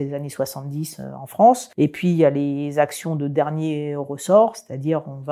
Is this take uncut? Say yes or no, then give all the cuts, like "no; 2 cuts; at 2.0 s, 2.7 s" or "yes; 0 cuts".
no; 1 cut; at 1.7 s